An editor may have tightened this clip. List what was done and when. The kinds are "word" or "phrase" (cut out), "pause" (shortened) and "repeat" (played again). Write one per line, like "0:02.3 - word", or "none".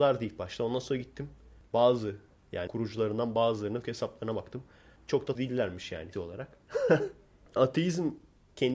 0:02.7 - word
0:03.8 - word
0:05.3 - word
0:06.1 - word
0:07.6 - word

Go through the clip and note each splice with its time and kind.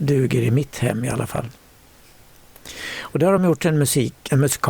none

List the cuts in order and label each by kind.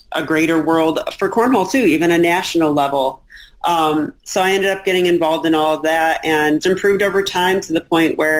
0:04.2 - pause
0:06.6 - word

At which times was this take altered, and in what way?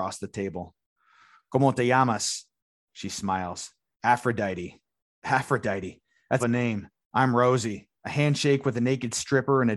0:06.4 - phrase
0:08.0 - pause

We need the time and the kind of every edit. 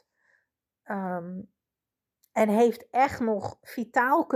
none

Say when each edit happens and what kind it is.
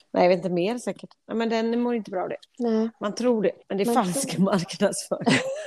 0:02.5 - pause
0:03.6 - pause

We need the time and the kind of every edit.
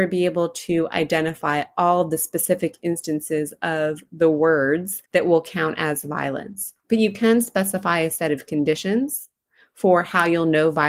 0:05.1 - pause
0:06.8 - pause

